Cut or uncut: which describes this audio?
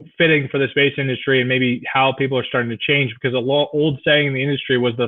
uncut